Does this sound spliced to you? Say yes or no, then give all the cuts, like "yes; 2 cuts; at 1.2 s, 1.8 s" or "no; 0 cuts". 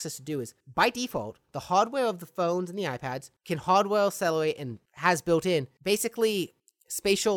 no; 0 cuts